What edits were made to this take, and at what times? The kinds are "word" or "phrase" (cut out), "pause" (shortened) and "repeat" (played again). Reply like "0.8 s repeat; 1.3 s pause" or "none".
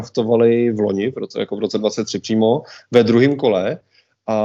none